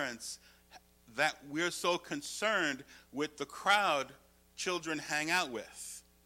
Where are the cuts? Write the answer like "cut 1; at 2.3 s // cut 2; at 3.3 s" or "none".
cut 1; at 0.9 s